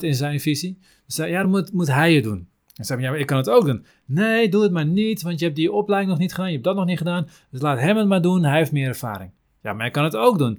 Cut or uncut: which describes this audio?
uncut